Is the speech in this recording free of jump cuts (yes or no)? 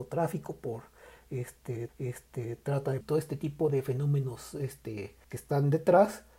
no